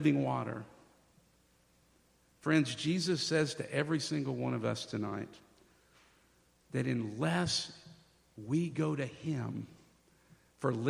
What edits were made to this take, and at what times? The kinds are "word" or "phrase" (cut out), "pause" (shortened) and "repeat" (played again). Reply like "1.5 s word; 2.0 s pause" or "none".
none